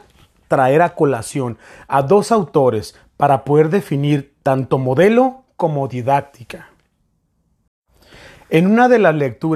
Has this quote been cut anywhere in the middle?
no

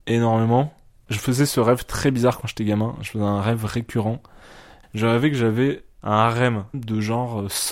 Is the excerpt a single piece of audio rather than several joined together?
yes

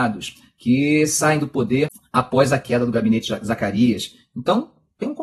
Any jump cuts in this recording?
no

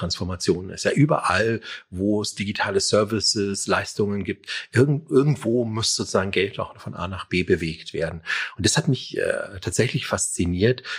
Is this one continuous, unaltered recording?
yes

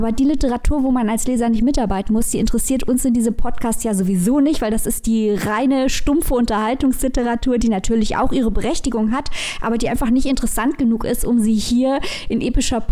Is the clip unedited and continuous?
yes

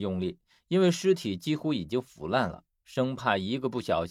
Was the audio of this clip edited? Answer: no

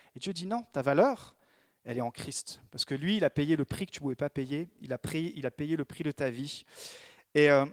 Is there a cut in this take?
no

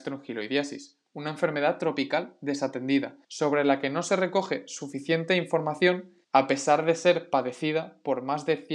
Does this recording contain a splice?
yes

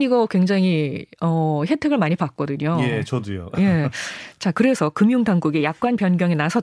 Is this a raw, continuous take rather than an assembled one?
yes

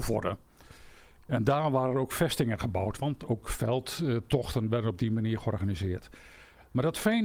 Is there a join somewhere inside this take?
no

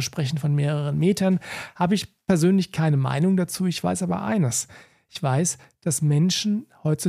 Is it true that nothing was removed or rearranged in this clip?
yes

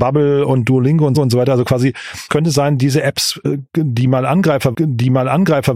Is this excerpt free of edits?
no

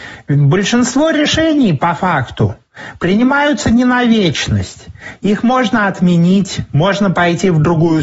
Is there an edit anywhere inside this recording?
no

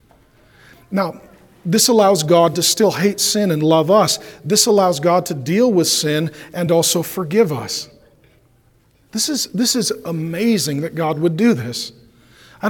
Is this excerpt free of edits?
yes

